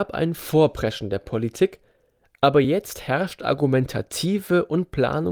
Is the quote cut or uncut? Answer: uncut